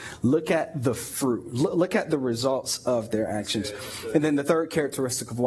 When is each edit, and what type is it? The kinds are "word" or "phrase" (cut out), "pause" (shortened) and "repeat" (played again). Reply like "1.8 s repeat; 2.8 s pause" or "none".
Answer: none